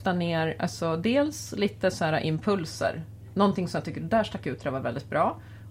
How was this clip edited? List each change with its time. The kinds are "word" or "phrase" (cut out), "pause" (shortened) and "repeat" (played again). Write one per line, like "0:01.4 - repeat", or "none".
none